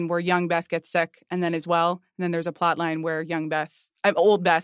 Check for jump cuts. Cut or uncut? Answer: uncut